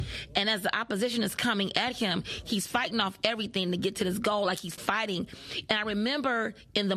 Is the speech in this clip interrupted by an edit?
yes; 1 cut; at 4.8 s

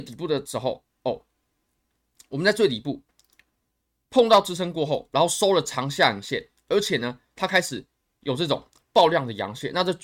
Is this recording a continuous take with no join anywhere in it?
yes; 0 cuts

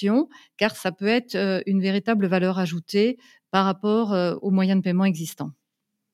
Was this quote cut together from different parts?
no; 0 cuts

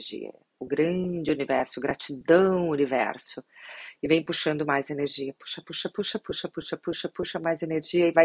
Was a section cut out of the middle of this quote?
no; 0 cuts

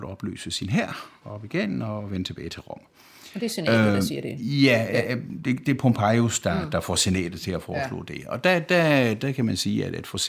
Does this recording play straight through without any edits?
yes; 0 cuts

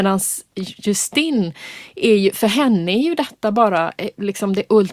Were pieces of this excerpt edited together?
no; 0 cuts

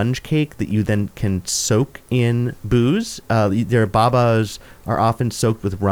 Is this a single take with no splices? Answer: yes; 0 cuts

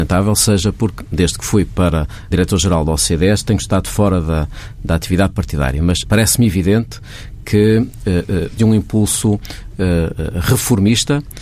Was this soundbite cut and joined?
yes; 3 cuts; at 2.3 s, 6.0 s, 8.6 s

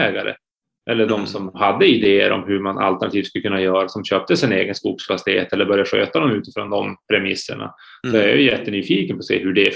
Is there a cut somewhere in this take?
no; 0 cuts

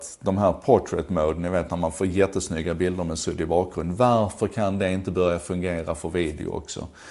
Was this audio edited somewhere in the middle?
no; 0 cuts

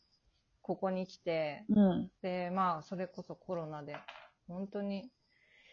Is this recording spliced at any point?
yes; 1 cut; at 2.2 s

